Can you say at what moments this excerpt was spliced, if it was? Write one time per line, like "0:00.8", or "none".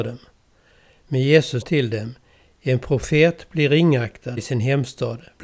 0:01.6
0:04.4